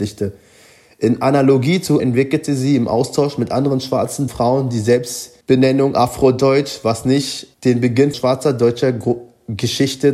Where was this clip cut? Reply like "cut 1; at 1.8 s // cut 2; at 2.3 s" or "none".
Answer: cut 1; at 2.0 s // cut 2; at 4.3 s // cut 3; at 5.4 s // cut 4; at 7.5 s // cut 5; at 8.1 s